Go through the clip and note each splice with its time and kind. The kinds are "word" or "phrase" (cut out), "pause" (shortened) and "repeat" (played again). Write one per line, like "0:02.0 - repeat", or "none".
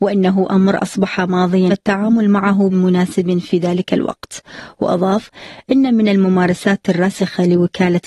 0:01.7 - phrase
0:02.7 - word